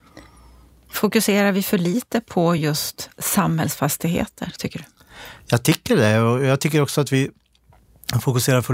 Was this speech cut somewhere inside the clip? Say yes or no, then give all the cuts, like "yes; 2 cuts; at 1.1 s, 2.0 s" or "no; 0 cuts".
no; 0 cuts